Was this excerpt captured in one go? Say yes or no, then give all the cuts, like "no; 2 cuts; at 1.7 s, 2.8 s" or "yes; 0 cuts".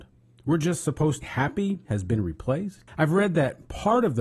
no; 3 cuts; at 1.2 s, 1.9 s, 2.9 s